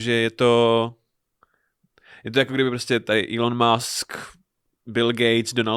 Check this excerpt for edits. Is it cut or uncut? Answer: uncut